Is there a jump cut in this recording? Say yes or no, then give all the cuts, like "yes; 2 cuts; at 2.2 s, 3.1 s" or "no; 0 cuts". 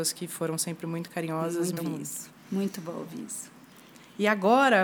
yes; 1 cut; at 1.8 s